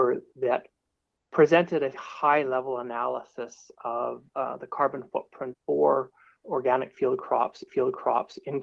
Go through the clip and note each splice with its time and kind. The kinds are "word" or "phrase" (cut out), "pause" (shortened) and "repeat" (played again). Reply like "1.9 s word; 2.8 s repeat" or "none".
1.9 s word; 4.3 s pause; 5.5 s word; 6.4 s word; 7.7 s repeat